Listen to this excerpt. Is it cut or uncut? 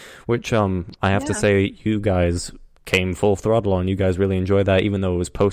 cut